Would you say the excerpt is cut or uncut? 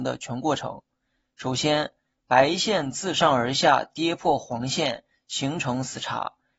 uncut